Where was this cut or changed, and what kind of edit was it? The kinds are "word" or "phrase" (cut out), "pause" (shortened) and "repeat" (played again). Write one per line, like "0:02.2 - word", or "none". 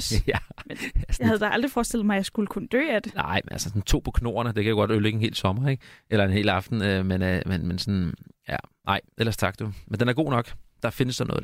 none